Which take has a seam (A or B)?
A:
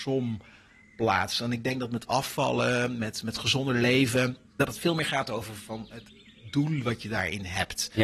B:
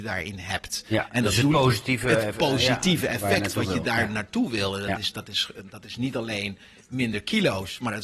A